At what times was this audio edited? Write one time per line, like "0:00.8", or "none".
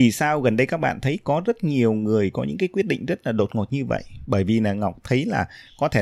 none